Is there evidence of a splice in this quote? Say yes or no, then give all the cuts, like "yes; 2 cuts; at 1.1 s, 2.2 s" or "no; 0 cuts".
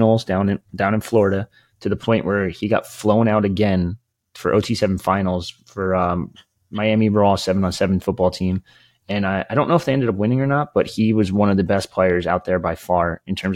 no; 0 cuts